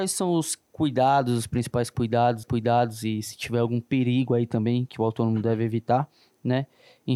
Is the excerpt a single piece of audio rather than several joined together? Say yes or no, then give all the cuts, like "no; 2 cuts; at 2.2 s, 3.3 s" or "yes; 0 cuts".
no; 1 cut; at 2.4 s